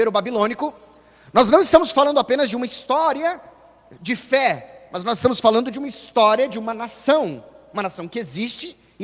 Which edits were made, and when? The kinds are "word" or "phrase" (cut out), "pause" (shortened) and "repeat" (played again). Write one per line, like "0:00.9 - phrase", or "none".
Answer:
none